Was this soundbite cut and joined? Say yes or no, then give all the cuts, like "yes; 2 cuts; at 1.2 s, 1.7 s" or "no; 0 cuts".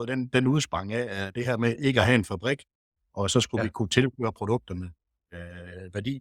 no; 0 cuts